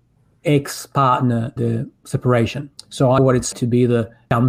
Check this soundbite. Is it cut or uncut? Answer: cut